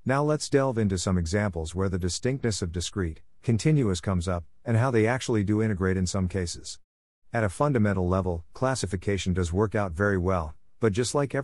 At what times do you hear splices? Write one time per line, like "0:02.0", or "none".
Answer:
none